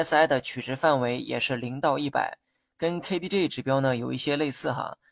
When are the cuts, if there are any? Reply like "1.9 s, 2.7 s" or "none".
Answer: none